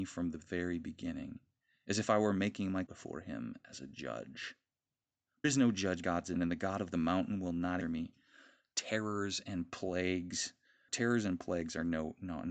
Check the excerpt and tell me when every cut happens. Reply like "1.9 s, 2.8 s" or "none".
2.9 s, 5.4 s, 6.0 s, 6.4 s, 7.8 s, 10.9 s

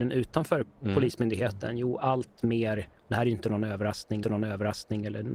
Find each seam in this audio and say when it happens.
3.0 s, 4.2 s

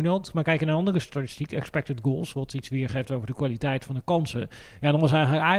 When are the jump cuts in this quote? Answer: none

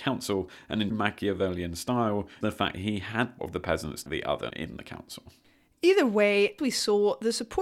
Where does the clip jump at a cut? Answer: 0.9 s, 2.4 s, 2.7 s, 3.4 s, 4.1 s, 4.5 s, 6.6 s

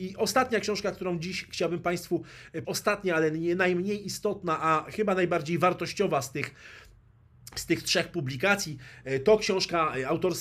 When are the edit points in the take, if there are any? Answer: 2.6 s

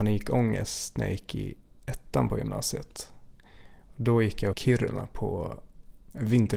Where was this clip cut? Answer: 4.5 s

